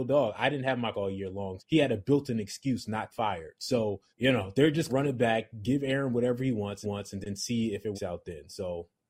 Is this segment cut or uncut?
cut